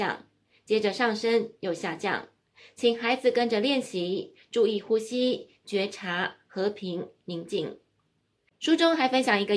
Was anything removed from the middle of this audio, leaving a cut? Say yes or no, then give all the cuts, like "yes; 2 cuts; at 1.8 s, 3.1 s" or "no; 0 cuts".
no; 0 cuts